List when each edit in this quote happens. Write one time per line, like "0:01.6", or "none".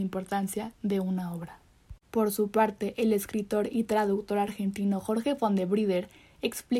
0:02.0